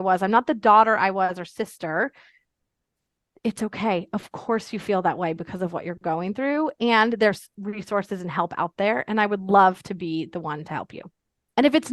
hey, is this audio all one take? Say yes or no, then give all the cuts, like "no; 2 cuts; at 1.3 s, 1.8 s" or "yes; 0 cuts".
yes; 0 cuts